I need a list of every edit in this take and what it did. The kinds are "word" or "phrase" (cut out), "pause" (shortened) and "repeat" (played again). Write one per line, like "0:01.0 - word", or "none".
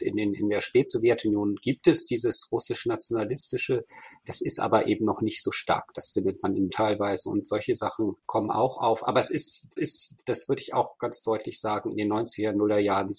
0:06.7 - word
0:08.2 - pause
0:09.8 - repeat